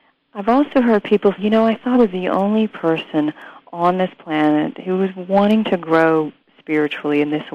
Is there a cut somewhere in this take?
yes; 2 cuts; at 1.4 s, 1.9 s

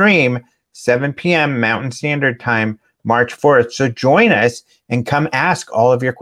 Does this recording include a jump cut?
no; 0 cuts

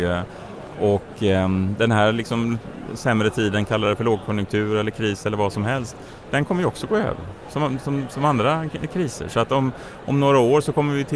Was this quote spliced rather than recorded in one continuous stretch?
no; 0 cuts

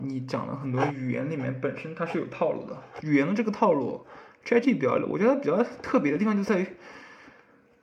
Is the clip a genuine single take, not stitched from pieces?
no; 1 cut; at 4.6 s

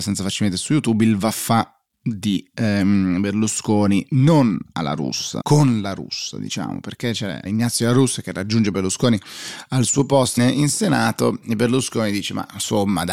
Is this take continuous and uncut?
no; 3 cuts; at 5.4 s, 7.4 s, 10.4 s

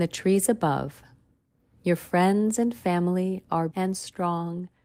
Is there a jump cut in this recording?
yes; 1 cut; at 3.7 s

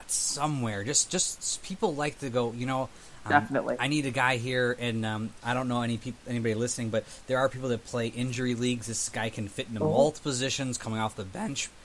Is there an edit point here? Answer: no; 0 cuts

